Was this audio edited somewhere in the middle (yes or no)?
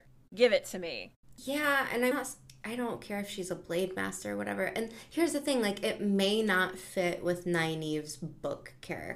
yes